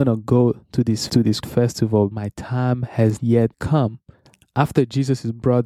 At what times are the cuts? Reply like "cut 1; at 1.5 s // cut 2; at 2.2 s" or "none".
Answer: cut 1; at 1.1 s // cut 2; at 1.4 s // cut 3; at 2.1 s // cut 4; at 3.2 s // cut 5; at 3.5 s